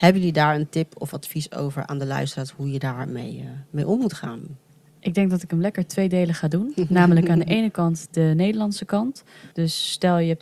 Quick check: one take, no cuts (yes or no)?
no